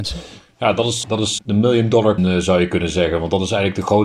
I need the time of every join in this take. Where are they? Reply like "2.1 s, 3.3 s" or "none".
1.0 s, 1.4 s, 2.2 s

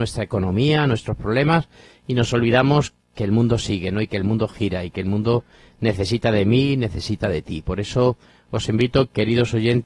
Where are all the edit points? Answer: 3.0 s

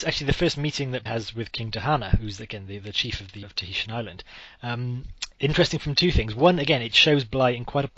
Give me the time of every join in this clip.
1.1 s, 3.4 s, 5.3 s

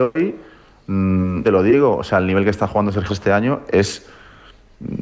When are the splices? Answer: 1.4 s, 3.1 s

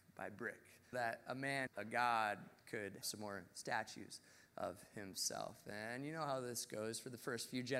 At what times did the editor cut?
0.9 s, 1.7 s, 3.0 s

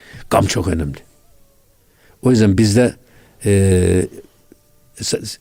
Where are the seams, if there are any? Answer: none

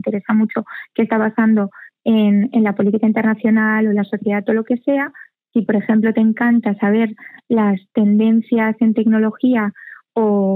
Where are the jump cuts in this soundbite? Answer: none

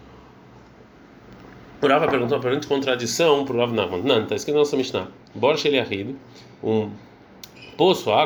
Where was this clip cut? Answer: none

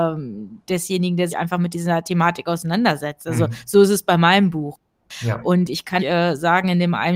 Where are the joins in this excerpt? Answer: 1.3 s, 6.0 s

